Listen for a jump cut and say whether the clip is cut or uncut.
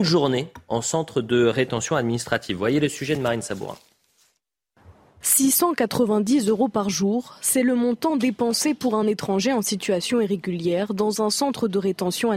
uncut